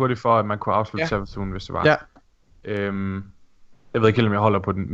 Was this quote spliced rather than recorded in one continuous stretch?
no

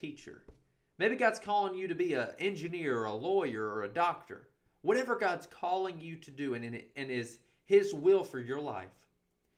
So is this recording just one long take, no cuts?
yes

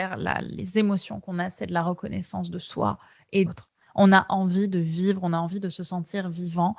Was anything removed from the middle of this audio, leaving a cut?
yes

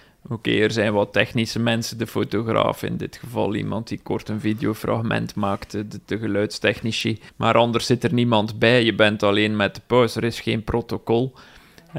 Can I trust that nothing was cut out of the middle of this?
no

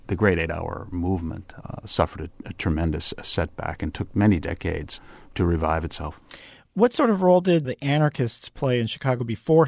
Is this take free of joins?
no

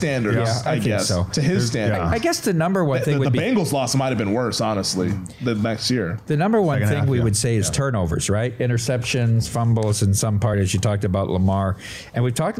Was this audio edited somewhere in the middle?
no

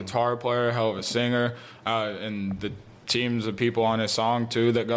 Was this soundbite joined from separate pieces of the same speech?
no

